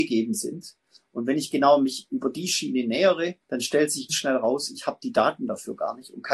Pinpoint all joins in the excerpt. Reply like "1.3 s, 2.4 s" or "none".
3.4 s, 4.1 s